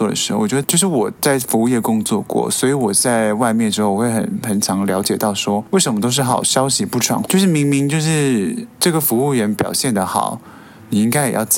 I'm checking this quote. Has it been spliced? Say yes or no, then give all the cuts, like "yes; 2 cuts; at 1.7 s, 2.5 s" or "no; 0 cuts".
yes; 1 cut; at 7.2 s